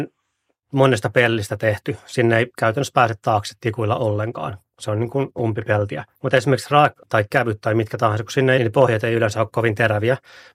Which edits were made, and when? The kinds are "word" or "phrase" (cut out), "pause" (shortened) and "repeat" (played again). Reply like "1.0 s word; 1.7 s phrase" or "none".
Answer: 6.1 s pause; 7.0 s word; 8.6 s phrase